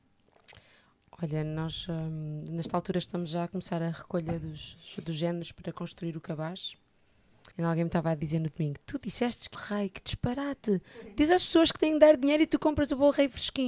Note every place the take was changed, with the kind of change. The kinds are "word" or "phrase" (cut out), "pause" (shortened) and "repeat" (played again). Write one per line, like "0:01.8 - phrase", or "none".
0:04.8 - word
0:07.5 - pause
0:09.5 - phrase